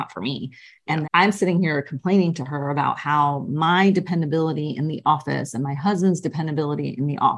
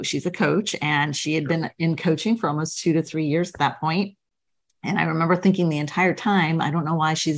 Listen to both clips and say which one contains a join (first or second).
first